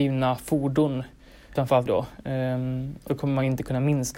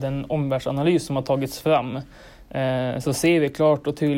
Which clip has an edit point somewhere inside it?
first; 3 cuts; at 1.6 s, 1.9 s, 3.1 s

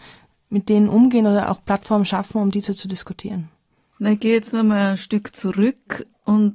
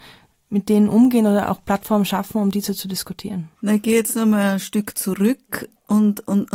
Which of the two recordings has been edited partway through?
second; 1 cut; at 3.6 s

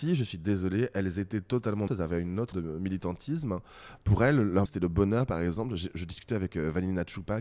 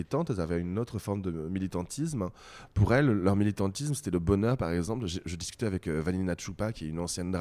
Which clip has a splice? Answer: first; 3 cuts; at 1.9 s, 2.5 s, 4.7 s

